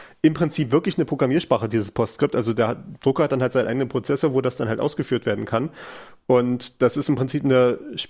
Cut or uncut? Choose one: uncut